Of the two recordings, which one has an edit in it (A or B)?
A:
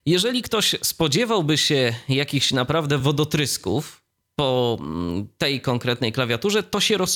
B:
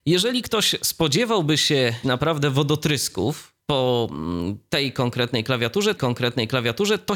B